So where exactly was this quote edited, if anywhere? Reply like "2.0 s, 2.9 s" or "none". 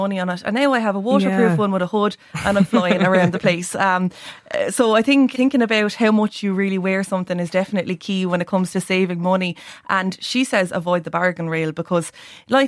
5.3 s